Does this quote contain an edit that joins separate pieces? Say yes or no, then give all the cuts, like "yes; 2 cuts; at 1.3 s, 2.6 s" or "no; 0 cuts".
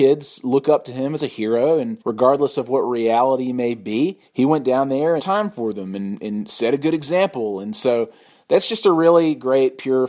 yes; 3 cuts; at 2.0 s, 4.3 s, 5.2 s